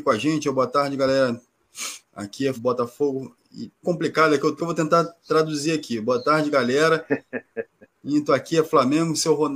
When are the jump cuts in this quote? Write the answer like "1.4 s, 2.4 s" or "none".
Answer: 2.0 s, 2.6 s, 3.8 s, 4.6 s